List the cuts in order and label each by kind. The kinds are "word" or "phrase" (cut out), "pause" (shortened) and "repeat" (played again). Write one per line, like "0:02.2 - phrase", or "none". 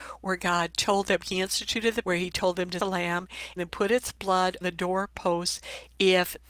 0:02.0 - word
0:02.8 - word
0:03.6 - word
0:04.6 - word